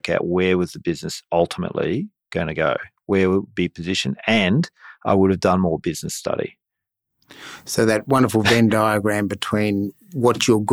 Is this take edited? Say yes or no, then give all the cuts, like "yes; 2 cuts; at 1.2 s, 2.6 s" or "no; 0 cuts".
no; 0 cuts